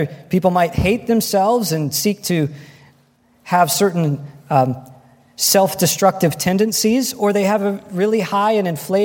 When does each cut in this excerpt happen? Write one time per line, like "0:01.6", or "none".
none